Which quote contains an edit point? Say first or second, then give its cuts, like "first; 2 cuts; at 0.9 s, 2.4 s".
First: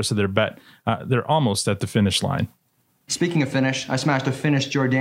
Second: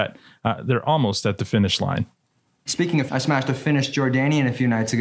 second; 1 cut; at 3.1 s